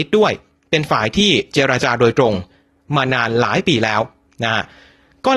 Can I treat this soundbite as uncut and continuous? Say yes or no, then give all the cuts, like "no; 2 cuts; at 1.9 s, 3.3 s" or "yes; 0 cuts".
yes; 0 cuts